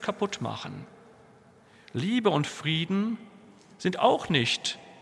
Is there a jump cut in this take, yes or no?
no